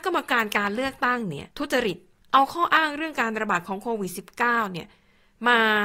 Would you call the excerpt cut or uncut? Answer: cut